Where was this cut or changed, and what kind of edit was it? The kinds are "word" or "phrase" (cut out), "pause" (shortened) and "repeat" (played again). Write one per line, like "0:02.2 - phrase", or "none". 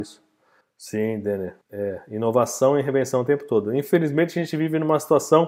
0:01.6 - pause